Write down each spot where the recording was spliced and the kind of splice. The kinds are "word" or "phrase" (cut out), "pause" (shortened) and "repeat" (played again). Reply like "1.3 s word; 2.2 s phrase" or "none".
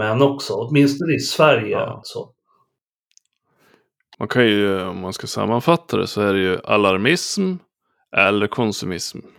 2.0 s phrase

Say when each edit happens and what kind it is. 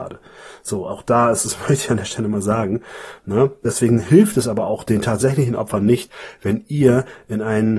none

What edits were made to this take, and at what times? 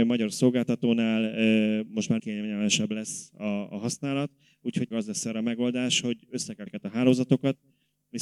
2.2 s word; 4.9 s word; 6.7 s word

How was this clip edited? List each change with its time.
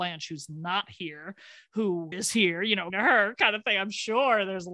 2.1 s word; 2.9 s word

